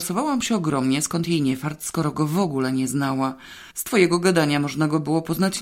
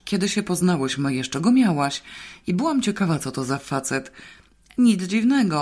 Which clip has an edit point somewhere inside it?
first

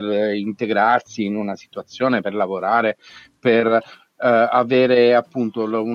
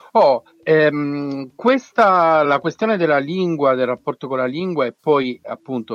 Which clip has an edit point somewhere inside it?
second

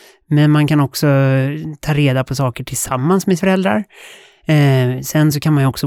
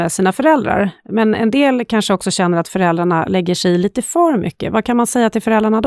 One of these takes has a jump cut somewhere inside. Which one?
first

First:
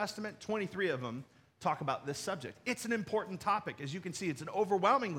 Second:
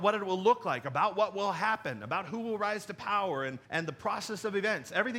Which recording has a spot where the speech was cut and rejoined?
second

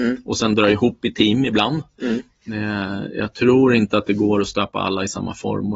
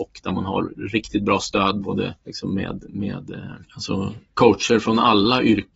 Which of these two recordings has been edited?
second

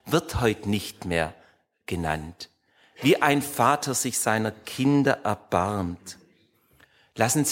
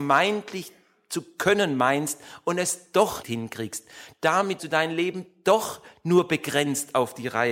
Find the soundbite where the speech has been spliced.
second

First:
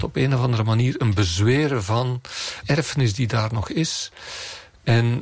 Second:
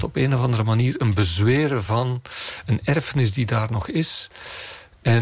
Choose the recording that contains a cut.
first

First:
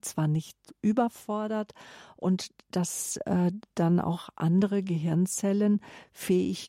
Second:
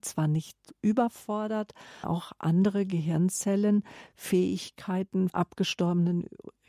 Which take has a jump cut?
second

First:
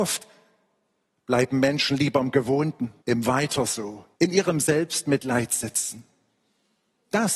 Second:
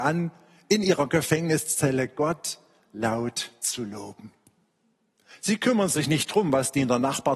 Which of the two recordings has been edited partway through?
first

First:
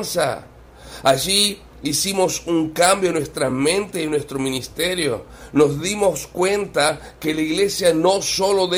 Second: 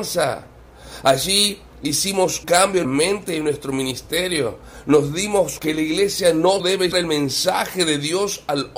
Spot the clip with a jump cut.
second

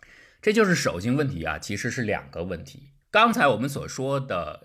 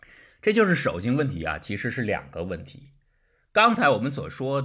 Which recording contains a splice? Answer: first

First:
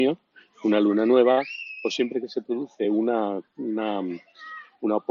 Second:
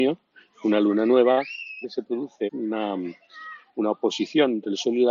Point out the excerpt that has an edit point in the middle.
second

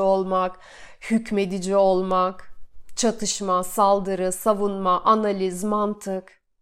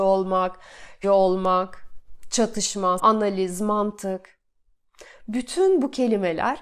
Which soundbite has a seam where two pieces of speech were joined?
second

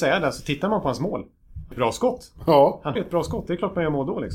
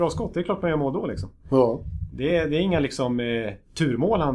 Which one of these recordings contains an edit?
first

